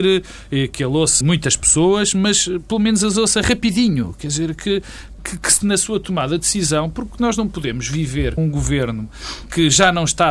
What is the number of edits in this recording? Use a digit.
4